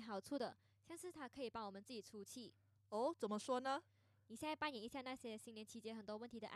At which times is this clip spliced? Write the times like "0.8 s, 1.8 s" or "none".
none